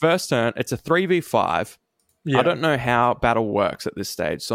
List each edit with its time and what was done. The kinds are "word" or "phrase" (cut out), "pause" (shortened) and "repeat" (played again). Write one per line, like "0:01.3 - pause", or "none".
none

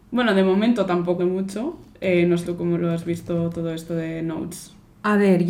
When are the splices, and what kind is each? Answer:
0:01.2 - phrase
0:02.4 - word
0:02.8 - word

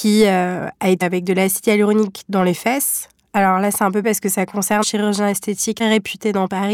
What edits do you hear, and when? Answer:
0:01.0 - word
0:04.0 - word
0:04.8 - word
0:05.8 - word

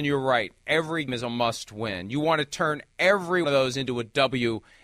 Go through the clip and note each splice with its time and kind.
0:01.1 - word
0:03.4 - word

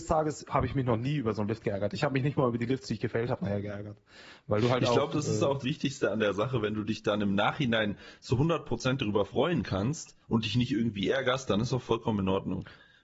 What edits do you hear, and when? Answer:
0:05.6 - word
0:10.2 - pause

